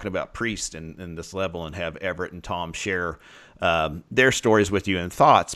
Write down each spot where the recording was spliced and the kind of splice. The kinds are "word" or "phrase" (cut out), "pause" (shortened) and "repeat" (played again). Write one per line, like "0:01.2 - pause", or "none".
none